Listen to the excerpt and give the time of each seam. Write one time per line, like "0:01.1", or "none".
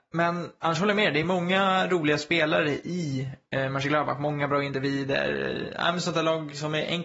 none

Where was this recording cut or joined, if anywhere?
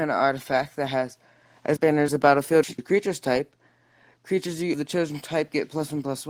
0:01.8
0:02.1
0:02.8
0:04.7

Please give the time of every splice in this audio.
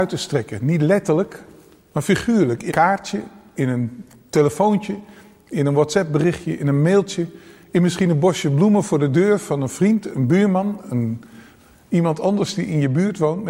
0:02.7

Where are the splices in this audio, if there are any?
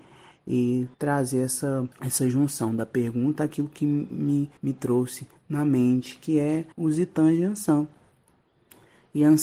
0:00.9
0:01.9
0:04.6
0:06.7

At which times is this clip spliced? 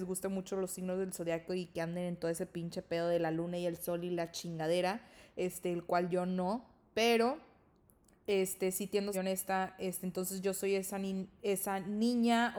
0:09.1

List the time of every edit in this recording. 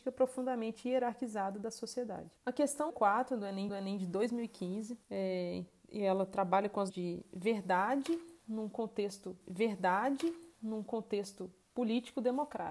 0:02.4
0:02.9
0:03.7
0:05.0
0:06.9
0:09.4

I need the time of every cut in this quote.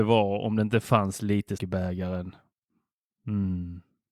0:01.6

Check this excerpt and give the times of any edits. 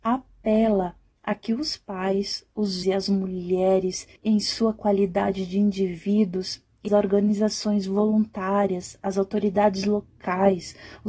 0:02.8
0:04.2
0:06.9

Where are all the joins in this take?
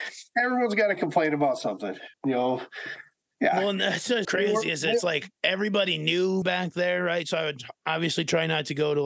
0:02.1
0:04.2
0:06.4

